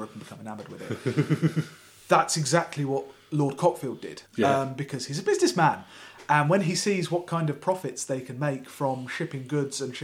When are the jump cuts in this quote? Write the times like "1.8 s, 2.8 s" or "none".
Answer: 4.3 s